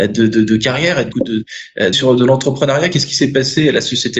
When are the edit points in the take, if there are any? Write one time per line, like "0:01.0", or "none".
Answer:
0:01.1
0:01.9

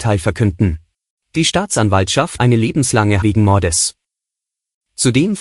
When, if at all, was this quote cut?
0:00.9
0:02.4
0:03.2

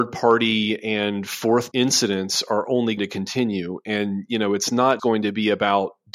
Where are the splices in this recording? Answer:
0:01.7
0:03.0
0:05.0

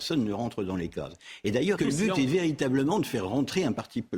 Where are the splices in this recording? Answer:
0:01.8

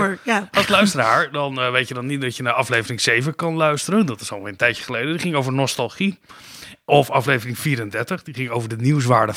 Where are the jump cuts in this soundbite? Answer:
none

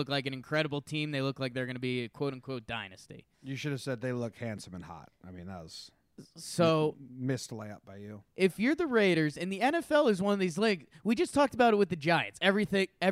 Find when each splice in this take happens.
0:03.3
0:08.3

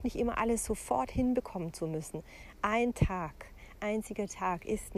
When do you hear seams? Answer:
0:03.8

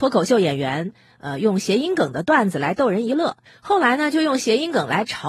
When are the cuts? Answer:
0:03.5

